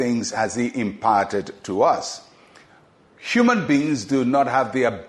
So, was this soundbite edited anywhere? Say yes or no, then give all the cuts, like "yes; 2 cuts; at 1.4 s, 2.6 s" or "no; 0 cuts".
no; 0 cuts